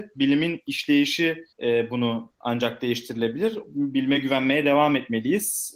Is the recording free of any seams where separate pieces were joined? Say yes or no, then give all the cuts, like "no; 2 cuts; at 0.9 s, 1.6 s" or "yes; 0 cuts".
no; 1 cut; at 1.5 s